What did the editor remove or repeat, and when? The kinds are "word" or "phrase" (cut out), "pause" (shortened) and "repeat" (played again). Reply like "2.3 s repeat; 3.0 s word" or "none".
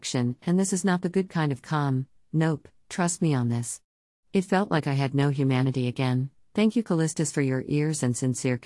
none